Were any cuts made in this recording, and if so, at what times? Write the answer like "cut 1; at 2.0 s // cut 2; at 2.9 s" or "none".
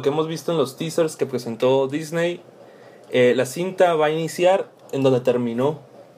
none